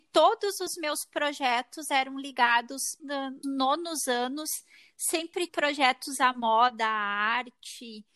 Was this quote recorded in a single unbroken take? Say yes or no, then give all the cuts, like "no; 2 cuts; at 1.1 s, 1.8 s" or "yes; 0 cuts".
no; 4 cuts; at 3.0 s, 3.4 s, 5.5 s, 6.2 s